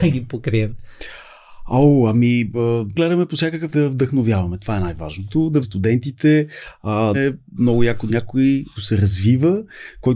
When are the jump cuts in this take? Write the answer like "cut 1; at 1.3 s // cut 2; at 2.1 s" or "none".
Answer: cut 1; at 2.9 s // cut 2; at 3.7 s // cut 3; at 5.6 s // cut 4; at 7.1 s // cut 5; at 7.5 s // cut 6; at 8.1 s // cut 7; at 8.8 s